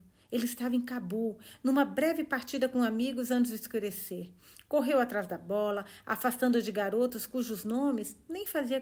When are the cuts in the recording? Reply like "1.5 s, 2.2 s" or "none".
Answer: none